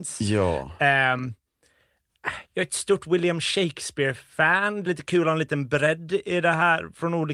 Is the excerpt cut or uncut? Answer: cut